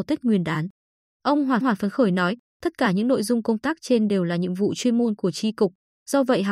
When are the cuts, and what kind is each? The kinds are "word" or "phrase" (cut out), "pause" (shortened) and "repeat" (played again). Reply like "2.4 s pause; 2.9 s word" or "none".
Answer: 1.6 s repeat